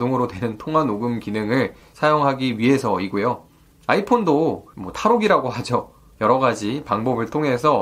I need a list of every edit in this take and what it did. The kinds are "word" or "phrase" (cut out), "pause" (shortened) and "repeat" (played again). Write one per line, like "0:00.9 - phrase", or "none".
none